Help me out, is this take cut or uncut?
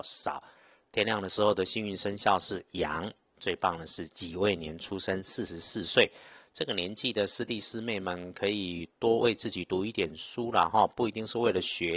uncut